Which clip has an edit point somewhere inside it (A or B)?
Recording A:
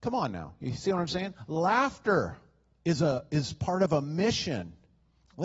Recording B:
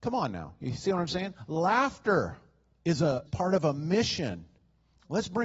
B